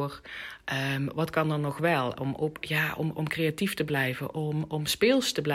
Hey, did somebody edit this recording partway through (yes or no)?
no